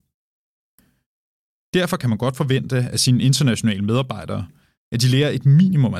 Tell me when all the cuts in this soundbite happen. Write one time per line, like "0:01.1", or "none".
none